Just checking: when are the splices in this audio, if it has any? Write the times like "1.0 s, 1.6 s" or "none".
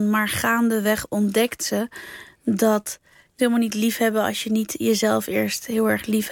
3.4 s